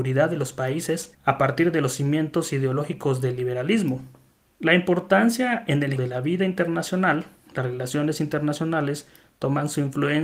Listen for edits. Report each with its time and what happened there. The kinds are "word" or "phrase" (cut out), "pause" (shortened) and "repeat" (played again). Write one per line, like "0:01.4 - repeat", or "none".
0:06.0 - word